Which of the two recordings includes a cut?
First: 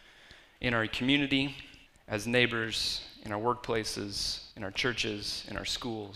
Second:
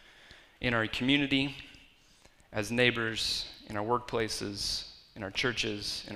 first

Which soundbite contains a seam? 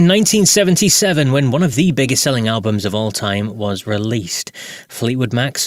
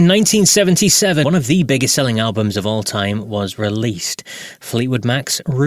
second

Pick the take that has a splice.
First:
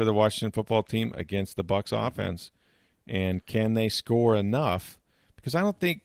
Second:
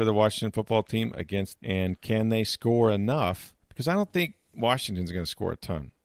second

